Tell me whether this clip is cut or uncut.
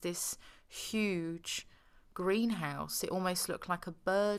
uncut